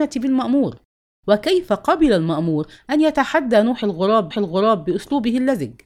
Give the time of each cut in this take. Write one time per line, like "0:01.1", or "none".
0:04.3

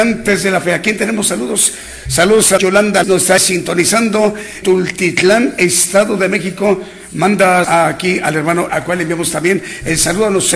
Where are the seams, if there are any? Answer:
0:02.6
0:03.0
0:03.4
0:04.6
0:07.6
0:08.7

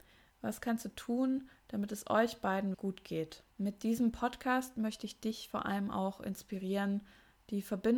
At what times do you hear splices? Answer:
0:02.7
0:03.5

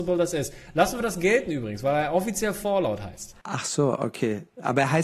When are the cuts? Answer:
0:03.4

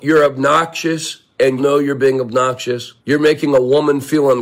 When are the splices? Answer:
0:01.6
0:03.0

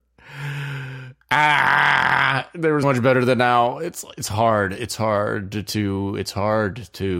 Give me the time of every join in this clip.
0:01.2
0:02.8

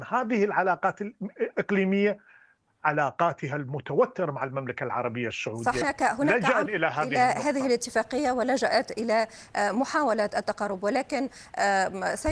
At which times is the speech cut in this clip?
0:05.8
0:06.7

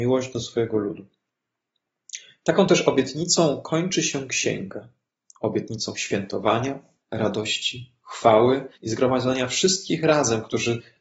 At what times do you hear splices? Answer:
0:07.0
0:08.7

